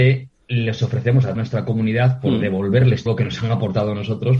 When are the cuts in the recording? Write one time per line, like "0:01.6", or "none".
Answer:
0:01.4
0:03.1

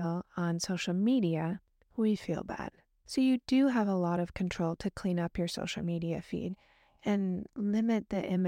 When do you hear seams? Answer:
none

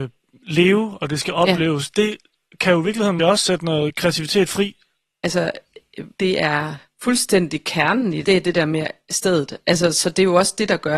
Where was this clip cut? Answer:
0:03.2
0:06.1
0:08.2

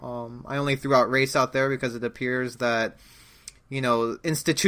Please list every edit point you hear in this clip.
none

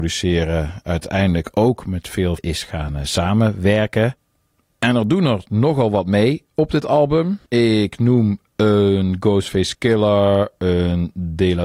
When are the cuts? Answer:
0:02.4
0:07.5

